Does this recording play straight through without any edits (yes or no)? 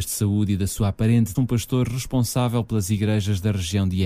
no